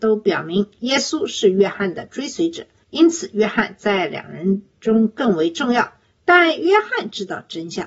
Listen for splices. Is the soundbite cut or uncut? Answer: uncut